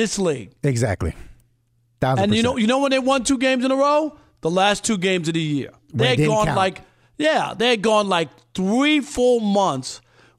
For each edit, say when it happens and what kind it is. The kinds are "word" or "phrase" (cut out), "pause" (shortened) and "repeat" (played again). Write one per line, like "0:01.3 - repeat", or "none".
none